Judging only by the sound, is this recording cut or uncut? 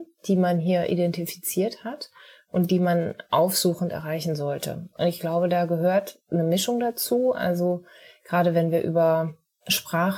uncut